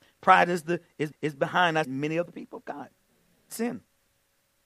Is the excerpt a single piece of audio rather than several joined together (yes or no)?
no